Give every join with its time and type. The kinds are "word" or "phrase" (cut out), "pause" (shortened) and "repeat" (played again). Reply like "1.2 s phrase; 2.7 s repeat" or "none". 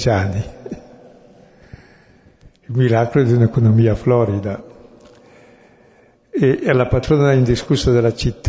none